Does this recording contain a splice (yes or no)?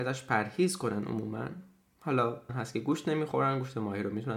yes